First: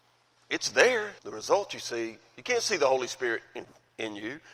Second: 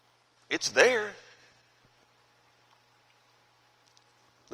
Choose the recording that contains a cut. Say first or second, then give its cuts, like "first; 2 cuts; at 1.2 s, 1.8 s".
first; 1 cut; at 1.2 s